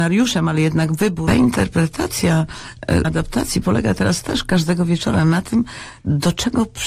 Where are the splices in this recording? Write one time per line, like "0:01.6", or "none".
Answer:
0:01.3
0:03.0